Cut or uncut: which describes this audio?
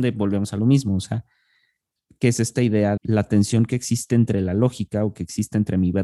cut